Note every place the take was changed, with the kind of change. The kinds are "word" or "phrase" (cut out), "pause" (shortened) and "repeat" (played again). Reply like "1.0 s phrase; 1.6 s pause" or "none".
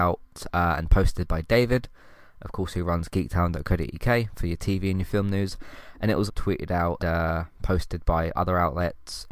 6.3 s word; 7.0 s word